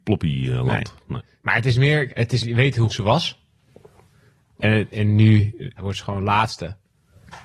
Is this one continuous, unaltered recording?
no; 5 cuts; at 2.1 s, 2.4 s, 2.9 s, 4.9 s, 5.8 s

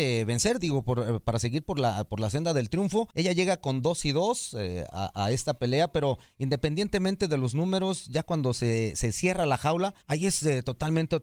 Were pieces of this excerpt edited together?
yes; 2 cuts; at 3.1 s, 10.0 s

